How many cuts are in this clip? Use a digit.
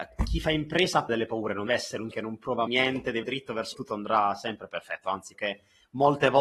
7